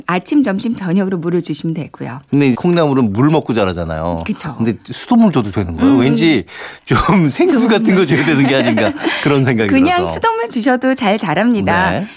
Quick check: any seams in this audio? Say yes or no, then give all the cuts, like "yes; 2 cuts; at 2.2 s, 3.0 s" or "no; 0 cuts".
yes; 1 cut; at 2.5 s